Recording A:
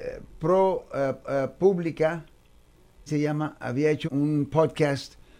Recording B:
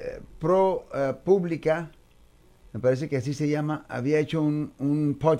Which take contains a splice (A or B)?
A